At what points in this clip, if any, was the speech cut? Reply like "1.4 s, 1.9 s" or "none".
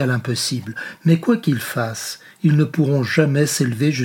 none